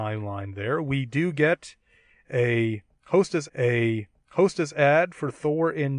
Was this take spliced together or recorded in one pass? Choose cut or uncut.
cut